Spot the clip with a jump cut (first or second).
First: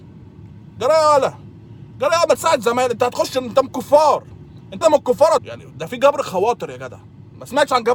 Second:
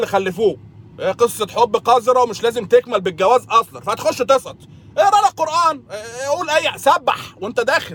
first